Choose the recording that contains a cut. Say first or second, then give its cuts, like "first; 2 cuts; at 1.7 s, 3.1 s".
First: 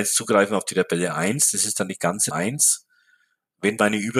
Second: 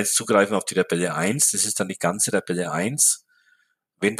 first; 1 cut; at 2.3 s